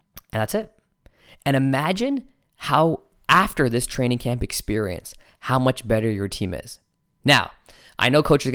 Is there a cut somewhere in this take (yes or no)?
no